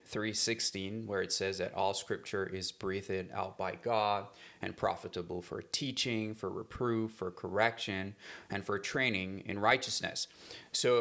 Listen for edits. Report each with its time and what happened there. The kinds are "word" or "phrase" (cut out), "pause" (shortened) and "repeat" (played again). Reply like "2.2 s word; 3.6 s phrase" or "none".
none